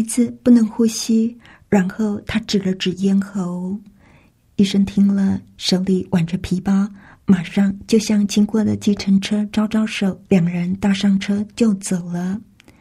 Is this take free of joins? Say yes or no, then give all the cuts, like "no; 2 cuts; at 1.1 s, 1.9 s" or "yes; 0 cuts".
no; 1 cut; at 10.3 s